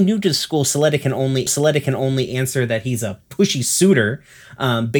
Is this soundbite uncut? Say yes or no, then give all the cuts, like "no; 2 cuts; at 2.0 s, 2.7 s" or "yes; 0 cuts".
no; 1 cut; at 1.5 s